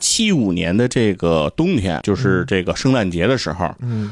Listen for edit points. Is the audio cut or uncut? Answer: cut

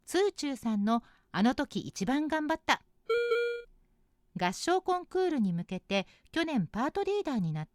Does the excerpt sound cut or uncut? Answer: uncut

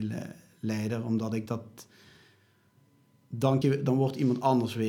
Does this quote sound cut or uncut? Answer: cut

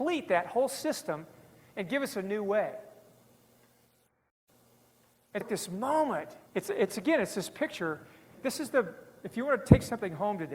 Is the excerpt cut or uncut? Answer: cut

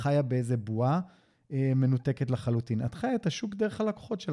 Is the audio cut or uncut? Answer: uncut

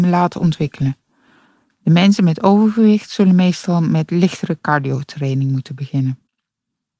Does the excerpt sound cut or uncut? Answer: uncut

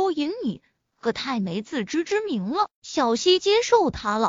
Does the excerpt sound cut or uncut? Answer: cut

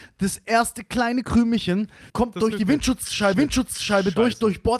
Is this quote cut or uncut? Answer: cut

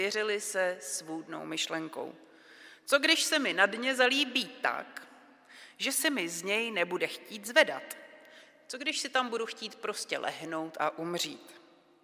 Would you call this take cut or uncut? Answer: uncut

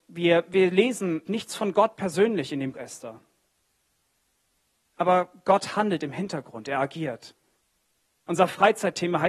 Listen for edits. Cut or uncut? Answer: cut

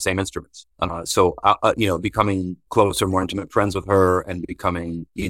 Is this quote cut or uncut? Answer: uncut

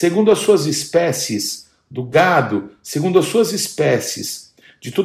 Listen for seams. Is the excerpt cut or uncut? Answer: uncut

